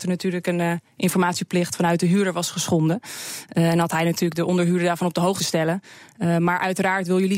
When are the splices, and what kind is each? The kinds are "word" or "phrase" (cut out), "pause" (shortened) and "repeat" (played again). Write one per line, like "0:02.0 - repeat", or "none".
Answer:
0:05.4 - word